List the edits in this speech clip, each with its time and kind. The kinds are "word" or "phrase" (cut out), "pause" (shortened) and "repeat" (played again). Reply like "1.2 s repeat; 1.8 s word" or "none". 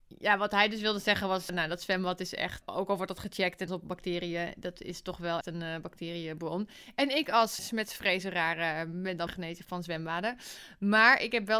1.5 s word; 2.6 s word; 3.7 s word; 5.4 s word; 7.6 s word; 9.3 s word; 9.6 s word